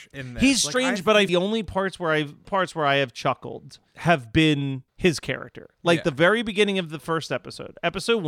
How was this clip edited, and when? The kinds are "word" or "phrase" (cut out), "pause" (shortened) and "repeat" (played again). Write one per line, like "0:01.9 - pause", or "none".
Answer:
0:01.3 - phrase
0:02.4 - phrase
0:03.9 - pause
0:04.9 - pause